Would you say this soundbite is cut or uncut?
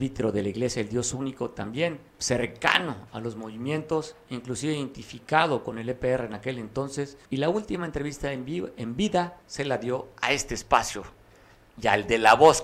cut